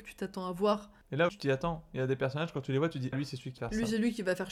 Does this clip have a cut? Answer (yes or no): yes